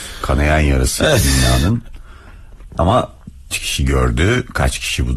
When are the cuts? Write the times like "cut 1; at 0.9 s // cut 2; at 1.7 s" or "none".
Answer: cut 1; at 3.5 s